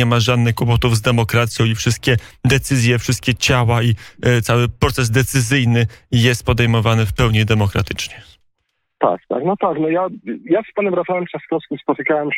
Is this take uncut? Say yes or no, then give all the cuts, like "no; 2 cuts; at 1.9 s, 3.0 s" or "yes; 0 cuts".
yes; 0 cuts